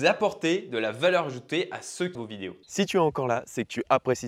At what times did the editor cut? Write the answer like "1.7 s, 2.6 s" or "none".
2.1 s, 2.6 s